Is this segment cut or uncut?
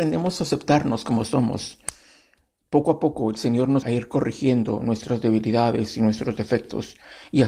cut